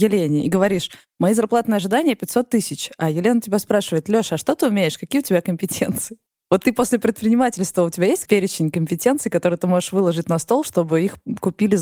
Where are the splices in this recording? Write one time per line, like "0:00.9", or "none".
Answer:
0:08.2